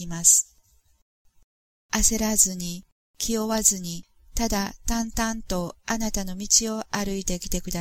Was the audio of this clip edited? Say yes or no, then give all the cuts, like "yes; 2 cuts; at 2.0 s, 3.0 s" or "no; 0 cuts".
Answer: no; 0 cuts